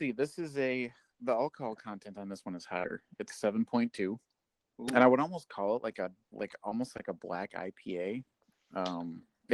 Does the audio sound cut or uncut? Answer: cut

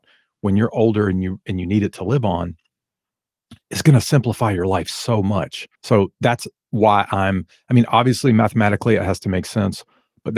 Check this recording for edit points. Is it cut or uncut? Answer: cut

